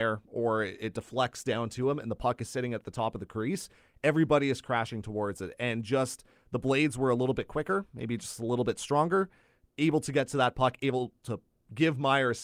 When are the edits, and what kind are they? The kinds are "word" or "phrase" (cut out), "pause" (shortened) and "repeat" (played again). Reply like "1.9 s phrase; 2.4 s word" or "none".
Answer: none